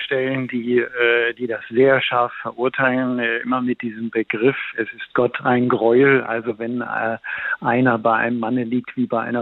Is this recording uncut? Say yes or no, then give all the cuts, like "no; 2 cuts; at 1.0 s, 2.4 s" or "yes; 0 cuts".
yes; 0 cuts